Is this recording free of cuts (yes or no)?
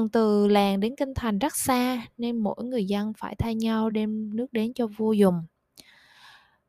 yes